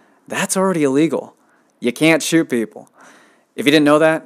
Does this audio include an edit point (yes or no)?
no